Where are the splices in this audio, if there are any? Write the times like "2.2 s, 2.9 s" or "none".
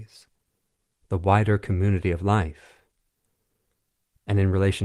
none